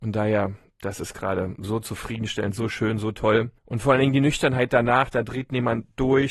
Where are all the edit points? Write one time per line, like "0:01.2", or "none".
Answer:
0:03.6